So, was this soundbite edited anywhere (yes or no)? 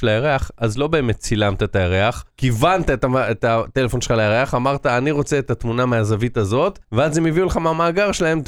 yes